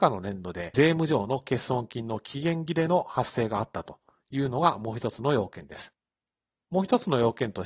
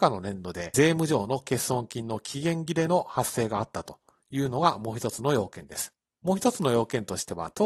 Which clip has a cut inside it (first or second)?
second